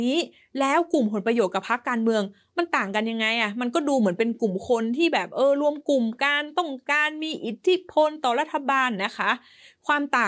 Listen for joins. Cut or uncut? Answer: uncut